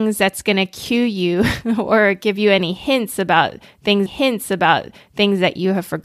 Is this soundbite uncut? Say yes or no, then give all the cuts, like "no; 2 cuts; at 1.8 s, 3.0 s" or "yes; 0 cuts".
no; 1 cut; at 4.1 s